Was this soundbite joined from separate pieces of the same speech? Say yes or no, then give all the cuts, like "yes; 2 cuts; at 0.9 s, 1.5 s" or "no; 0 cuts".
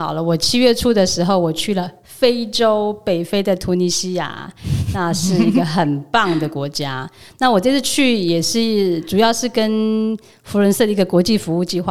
no; 0 cuts